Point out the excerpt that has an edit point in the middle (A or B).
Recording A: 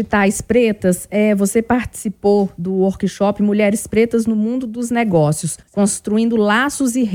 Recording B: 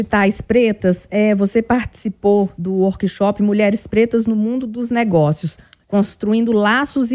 A